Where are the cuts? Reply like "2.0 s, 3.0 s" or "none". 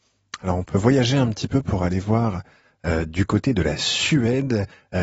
none

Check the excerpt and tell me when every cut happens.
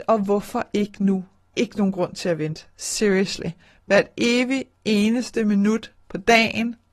1.5 s

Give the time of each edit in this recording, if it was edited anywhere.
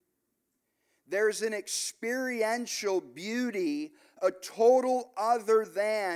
none

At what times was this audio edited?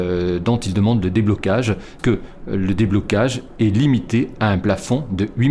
2.0 s

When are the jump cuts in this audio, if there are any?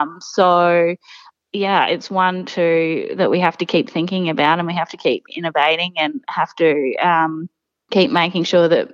none

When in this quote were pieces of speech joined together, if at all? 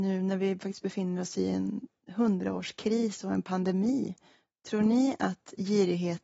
none

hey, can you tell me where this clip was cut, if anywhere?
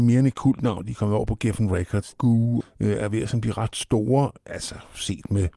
2.1 s, 2.6 s

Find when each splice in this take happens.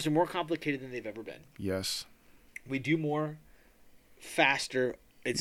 none

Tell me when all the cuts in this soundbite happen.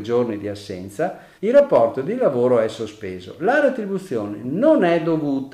1.4 s

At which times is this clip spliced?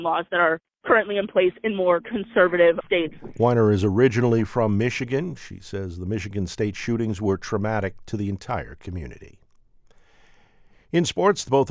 none

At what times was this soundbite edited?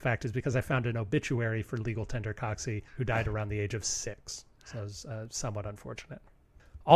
2.9 s

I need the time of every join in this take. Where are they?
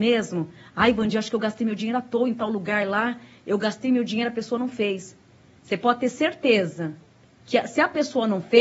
none

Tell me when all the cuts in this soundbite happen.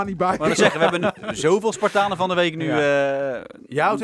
none

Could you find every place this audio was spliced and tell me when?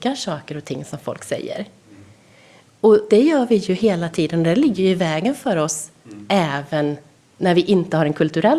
3.1 s

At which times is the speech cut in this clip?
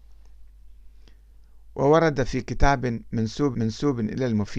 3.5 s

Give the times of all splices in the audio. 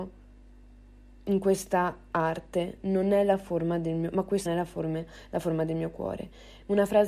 2.8 s, 4.5 s

